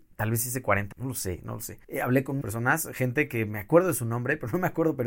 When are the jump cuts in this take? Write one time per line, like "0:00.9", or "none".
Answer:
0:00.9
0:01.8
0:02.4